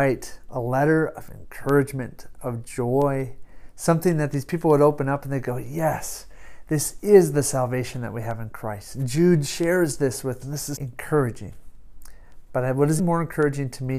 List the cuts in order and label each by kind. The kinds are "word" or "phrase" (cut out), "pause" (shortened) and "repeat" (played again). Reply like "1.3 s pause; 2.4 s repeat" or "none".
10.4 s word; 10.8 s word; 13.0 s word

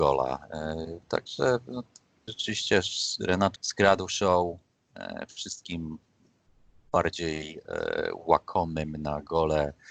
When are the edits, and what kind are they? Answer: 2.3 s word; 3.6 s word

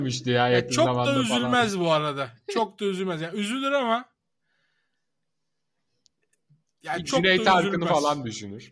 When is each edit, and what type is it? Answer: none

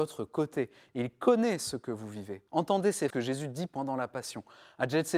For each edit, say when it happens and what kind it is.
2.5 s pause; 3.1 s word

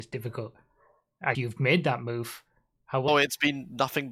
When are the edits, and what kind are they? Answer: 1.3 s word; 3.1 s word

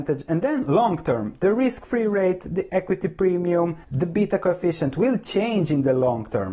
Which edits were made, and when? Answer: 3.8 s pause

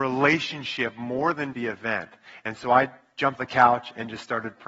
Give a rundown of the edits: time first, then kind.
1.5 s word; 3.4 s word

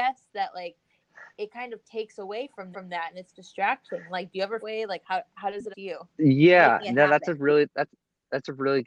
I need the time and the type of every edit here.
1.3 s pause; 2.7 s repeat; 4.6 s phrase; 5.7 s word; 6.1 s pause

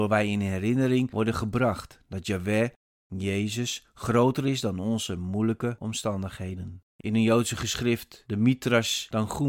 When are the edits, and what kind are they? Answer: 6.9 s pause

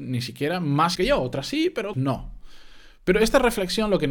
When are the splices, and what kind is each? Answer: 1.0 s word; 1.9 s word

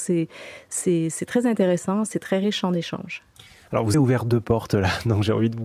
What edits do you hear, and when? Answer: 3.9 s word

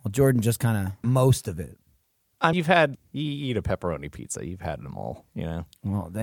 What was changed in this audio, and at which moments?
1.0 s word; 2.5 s word; 2.9 s word

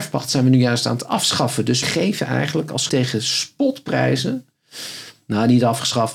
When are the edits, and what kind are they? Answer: 1.8 s word; 2.9 s phrase

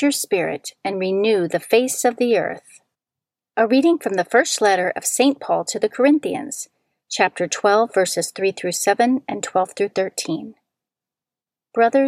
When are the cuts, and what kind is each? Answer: 2.9 s pause

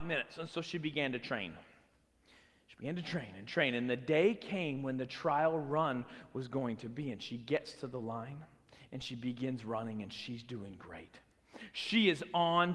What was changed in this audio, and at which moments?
none

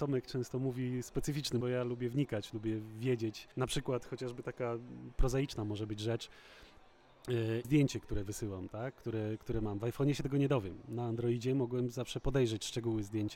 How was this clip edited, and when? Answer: 1.6 s word; 3.5 s pause; 7.6 s phrase

